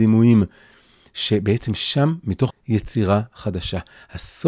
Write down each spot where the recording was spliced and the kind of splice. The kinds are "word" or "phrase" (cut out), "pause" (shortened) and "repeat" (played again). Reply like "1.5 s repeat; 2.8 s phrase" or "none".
2.5 s phrase

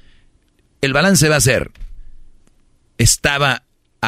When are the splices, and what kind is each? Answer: none

